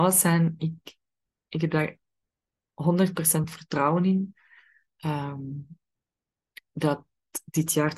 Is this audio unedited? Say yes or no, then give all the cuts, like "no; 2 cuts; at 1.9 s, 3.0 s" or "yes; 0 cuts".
yes; 0 cuts